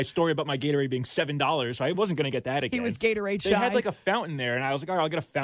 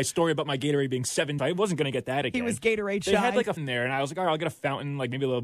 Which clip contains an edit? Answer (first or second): second